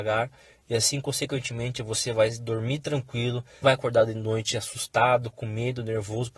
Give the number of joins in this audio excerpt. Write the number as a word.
one